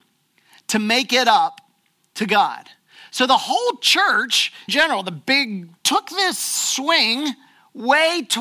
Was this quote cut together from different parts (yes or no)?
yes